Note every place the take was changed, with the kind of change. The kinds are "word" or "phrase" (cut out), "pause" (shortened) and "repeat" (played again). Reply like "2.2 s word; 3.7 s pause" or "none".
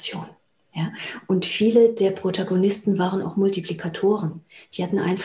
none